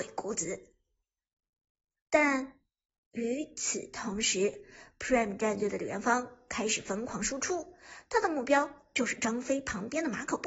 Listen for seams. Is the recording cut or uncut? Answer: uncut